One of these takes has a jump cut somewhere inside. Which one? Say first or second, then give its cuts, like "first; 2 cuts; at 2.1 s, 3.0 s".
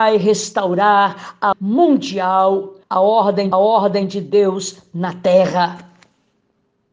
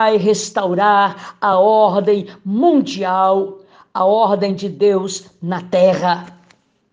first; 3 cuts; at 1.5 s, 2.8 s, 3.5 s